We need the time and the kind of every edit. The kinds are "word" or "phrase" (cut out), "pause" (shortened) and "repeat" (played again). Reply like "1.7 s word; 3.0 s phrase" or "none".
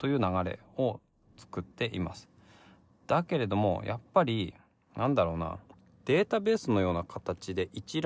none